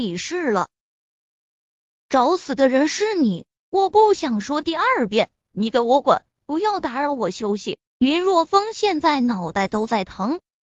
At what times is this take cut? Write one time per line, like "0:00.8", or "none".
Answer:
0:07.9

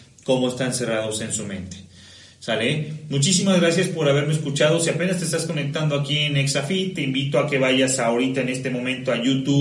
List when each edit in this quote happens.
none

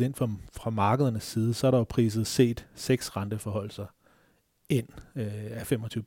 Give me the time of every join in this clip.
0:02.3

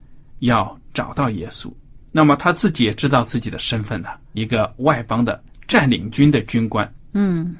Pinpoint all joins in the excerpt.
0:04.3

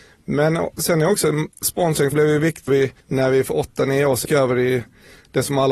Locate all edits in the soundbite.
0:01.5
0:02.1
0:02.7
0:03.0
0:04.2

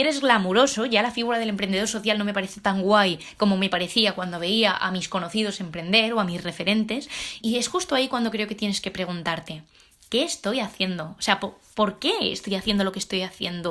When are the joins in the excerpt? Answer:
0:07.4

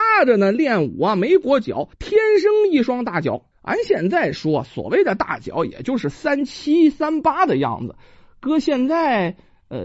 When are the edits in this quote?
0:01.9
0:03.5

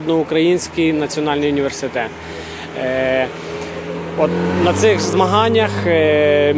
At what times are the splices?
none

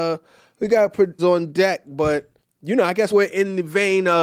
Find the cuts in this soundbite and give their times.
0:01.2
0:02.4
0:03.1

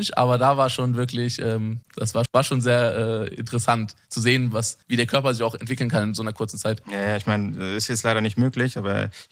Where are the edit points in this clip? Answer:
0:01.8
0:02.3
0:04.8

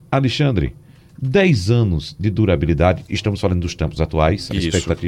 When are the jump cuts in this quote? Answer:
none

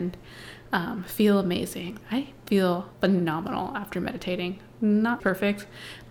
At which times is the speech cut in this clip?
0:02.0
0:02.9
0:05.2

